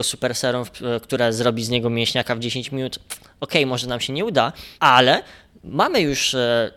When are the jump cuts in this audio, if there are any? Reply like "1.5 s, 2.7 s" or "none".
4.8 s